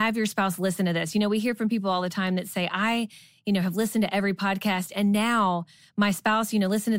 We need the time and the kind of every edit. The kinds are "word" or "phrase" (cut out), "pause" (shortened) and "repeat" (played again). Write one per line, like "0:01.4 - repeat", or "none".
none